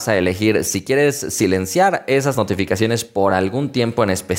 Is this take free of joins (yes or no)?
yes